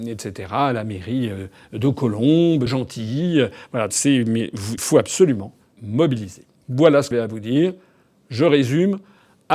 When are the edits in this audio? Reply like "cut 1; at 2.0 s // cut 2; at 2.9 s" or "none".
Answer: cut 1; at 2.7 s // cut 2; at 3.9 s // cut 3; at 4.8 s // cut 4; at 5.7 s // cut 5; at 7.1 s